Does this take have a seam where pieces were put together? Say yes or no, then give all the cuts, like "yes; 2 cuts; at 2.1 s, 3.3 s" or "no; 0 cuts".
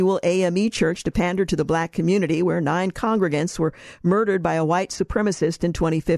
no; 0 cuts